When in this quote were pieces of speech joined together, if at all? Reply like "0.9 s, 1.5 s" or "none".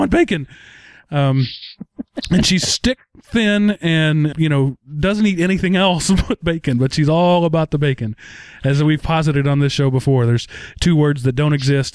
4.3 s